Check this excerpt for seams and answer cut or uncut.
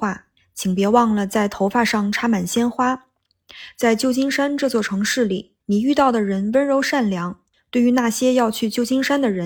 cut